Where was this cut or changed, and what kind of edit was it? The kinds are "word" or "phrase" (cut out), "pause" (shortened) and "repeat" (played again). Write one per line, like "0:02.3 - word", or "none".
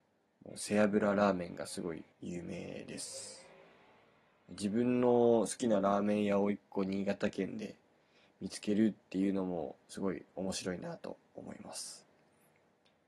0:02.1 - pause